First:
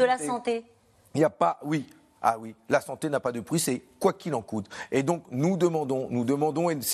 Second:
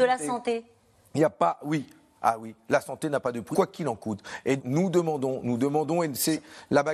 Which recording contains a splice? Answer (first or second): second